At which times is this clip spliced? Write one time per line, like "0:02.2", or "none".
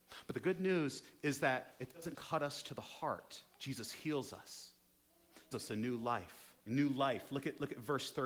0:02.1
0:03.5
0:05.5
0:06.6